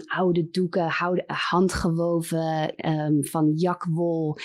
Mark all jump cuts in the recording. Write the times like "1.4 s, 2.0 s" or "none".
none